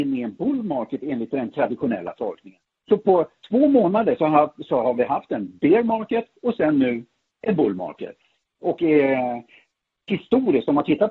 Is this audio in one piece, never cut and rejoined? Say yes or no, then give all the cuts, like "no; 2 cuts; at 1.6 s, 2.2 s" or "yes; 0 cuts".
yes; 0 cuts